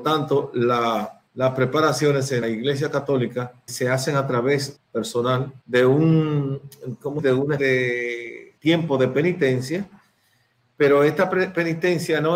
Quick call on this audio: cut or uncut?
cut